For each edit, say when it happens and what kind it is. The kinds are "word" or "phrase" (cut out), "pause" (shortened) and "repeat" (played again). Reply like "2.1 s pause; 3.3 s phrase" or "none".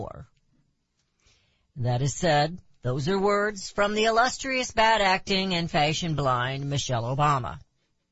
none